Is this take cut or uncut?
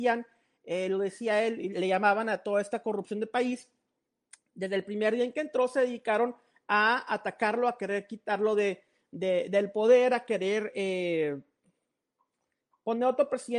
cut